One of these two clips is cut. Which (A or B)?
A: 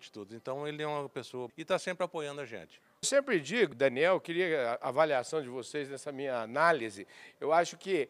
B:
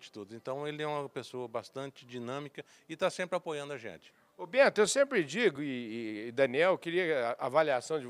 A